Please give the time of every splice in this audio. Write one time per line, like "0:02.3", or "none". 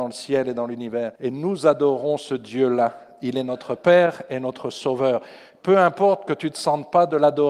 0:01.2